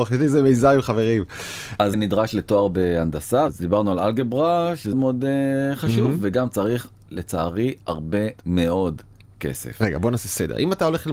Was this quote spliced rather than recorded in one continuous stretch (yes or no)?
yes